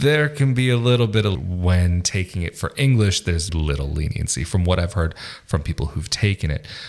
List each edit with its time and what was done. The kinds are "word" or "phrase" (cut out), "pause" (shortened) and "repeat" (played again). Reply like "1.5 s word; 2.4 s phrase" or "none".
1.3 s word; 3.5 s word